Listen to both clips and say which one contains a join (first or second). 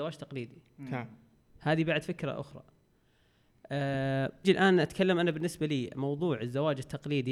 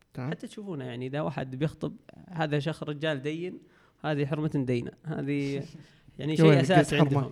first